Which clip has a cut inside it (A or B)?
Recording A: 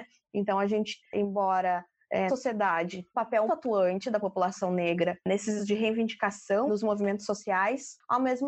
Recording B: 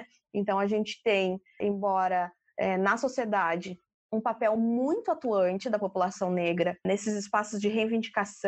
A